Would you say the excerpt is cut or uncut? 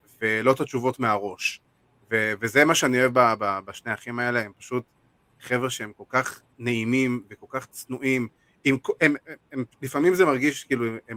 uncut